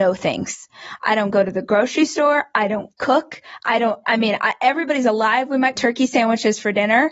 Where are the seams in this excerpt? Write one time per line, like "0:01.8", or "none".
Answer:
0:04.0
0:05.8

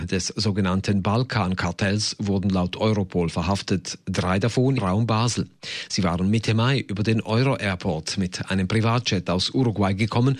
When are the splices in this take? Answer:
0:04.8

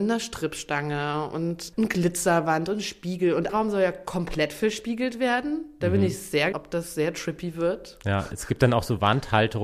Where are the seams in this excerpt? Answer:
0:01.7
0:03.5
0:06.5

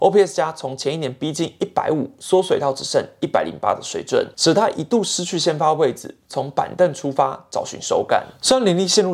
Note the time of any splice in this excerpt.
0:04.3

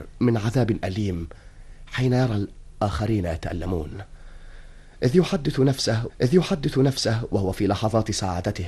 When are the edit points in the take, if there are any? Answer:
0:06.1

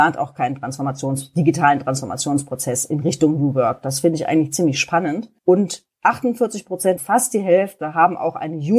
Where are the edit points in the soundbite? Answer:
0:05.4
0:07.0

